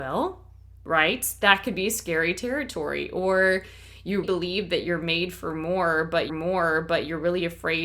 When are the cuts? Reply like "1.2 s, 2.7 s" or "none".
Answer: 4.2 s, 6.3 s